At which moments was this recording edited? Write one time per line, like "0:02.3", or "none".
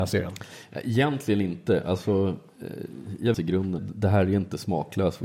0:03.3
0:03.8